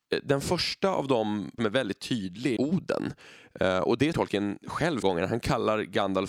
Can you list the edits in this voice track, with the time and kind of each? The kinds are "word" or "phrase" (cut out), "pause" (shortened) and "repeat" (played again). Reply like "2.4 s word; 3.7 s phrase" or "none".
1.6 s word; 2.6 s word; 4.1 s word; 5.0 s word